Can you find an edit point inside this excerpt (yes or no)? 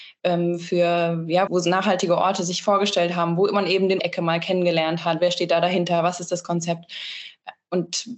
yes